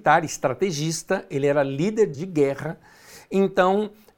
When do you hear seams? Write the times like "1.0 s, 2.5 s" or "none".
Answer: 2.1 s